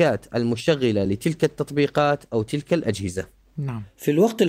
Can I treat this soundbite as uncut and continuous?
yes; 0 cuts

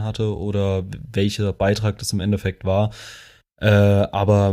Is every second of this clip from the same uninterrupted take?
yes; 0 cuts

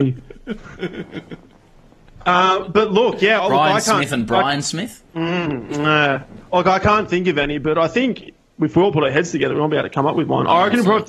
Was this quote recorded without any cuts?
no; 2 cuts; at 3.4 s, 5.1 s

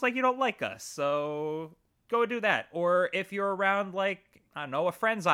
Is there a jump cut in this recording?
no; 0 cuts

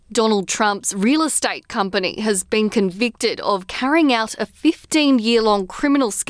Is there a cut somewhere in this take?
no; 0 cuts

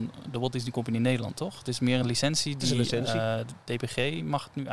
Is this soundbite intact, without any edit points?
yes; 0 cuts

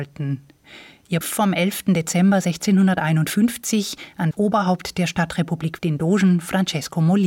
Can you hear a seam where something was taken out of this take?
yes; 3 cuts; at 1.2 s, 4.3 s, 5.8 s

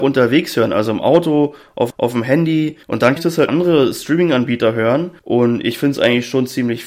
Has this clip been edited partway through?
yes; 5 cuts; at 1.9 s, 2.8 s, 3.2 s, 3.5 s, 5.2 s

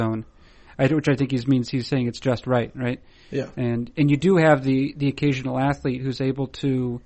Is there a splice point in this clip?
no; 0 cuts

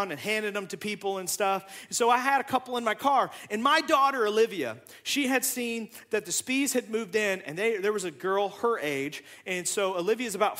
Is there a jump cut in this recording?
no; 0 cuts

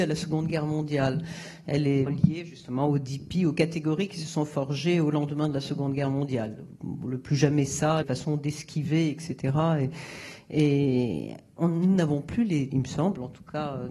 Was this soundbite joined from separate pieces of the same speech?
yes; 3 cuts; at 2.1 s, 8.0 s, 12.7 s

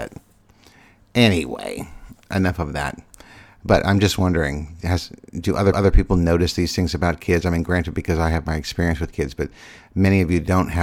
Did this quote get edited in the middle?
yes; 1 cut; at 5.7 s

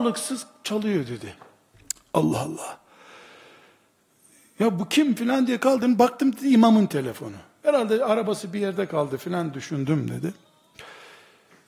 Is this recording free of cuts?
yes; 0 cuts

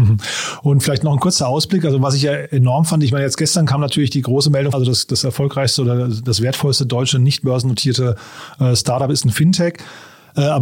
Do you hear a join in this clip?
yes; 1 cut; at 4.7 s

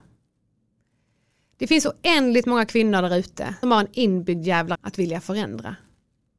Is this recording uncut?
no; 2 cuts; at 3.6 s, 4.7 s

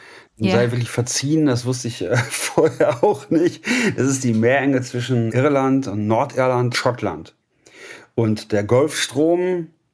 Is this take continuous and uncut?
no; 2 cuts; at 5.3 s, 6.7 s

